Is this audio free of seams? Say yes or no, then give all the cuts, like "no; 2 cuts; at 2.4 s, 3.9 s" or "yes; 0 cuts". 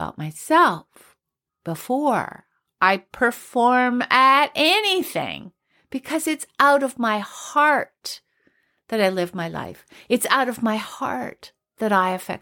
yes; 0 cuts